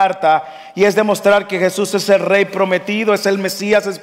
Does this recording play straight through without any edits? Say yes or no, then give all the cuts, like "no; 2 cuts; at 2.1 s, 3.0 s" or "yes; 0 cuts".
yes; 0 cuts